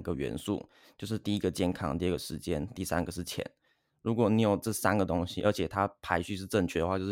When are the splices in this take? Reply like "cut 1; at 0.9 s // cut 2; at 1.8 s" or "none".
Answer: none